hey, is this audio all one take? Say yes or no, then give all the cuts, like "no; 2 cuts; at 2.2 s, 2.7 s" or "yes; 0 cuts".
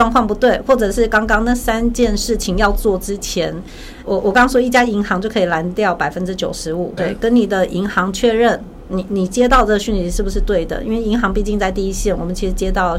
no; 2 cuts; at 4.0 s, 7.0 s